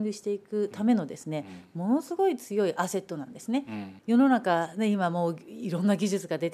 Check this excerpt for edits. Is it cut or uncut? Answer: uncut